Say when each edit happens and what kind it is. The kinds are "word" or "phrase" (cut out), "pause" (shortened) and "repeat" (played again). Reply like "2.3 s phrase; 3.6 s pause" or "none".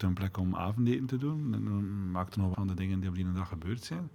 2.5 s word